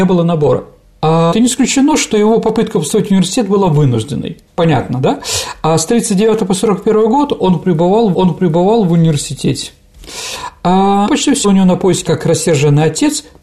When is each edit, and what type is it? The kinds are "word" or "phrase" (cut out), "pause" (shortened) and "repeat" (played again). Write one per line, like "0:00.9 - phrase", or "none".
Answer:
0:01.3 - word
0:04.5 - pause
0:08.1 - repeat
0:11.1 - word
0:11.4 - phrase
0:12.1 - phrase